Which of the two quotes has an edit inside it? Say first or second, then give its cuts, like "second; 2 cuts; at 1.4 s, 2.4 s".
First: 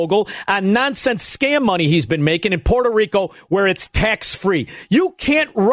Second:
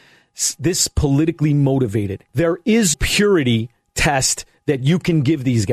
second; 2 cuts; at 2.3 s, 2.9 s